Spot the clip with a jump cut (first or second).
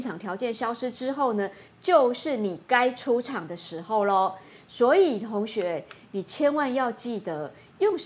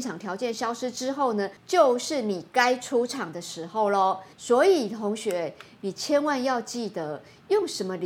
second